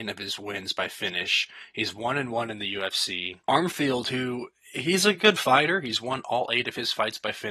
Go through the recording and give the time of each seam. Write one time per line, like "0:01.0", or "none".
none